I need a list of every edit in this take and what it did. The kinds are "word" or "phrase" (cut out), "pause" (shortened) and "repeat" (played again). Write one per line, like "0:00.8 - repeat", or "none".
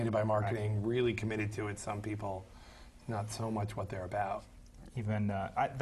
none